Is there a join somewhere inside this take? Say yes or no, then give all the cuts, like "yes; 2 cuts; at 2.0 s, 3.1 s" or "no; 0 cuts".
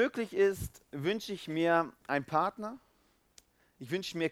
no; 0 cuts